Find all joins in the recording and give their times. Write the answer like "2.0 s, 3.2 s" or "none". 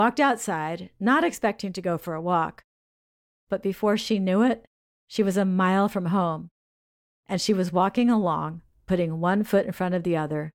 none